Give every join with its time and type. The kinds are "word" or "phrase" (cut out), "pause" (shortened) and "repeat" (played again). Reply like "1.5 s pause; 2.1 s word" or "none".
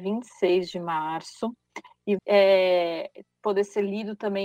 2.2 s word